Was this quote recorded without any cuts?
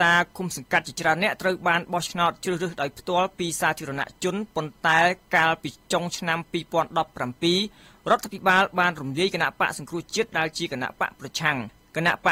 yes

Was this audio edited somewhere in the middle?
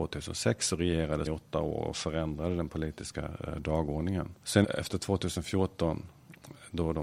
yes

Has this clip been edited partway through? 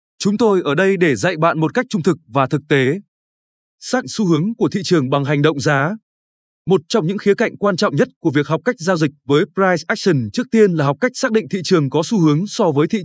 yes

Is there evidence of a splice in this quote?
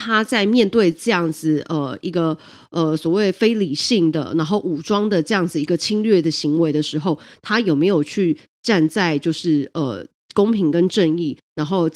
no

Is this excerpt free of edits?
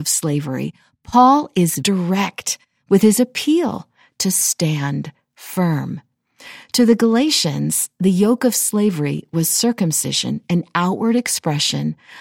no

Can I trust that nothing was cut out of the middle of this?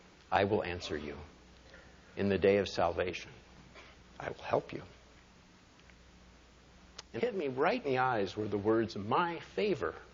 no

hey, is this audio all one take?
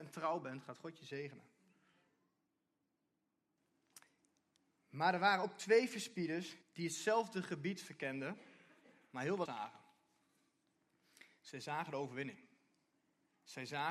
no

